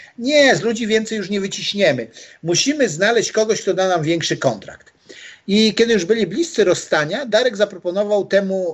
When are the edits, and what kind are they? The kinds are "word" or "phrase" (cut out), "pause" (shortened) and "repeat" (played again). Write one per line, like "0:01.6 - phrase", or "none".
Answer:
none